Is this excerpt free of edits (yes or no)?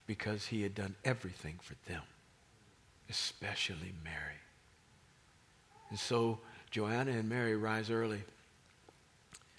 yes